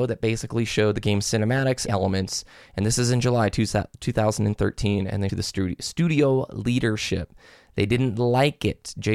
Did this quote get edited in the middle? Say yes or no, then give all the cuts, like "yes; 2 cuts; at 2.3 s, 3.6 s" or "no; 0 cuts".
yes; 2 cuts; at 1.9 s, 5.3 s